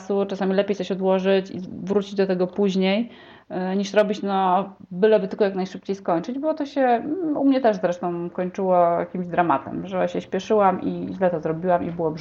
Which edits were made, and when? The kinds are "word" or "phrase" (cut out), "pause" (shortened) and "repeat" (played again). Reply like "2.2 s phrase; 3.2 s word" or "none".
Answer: none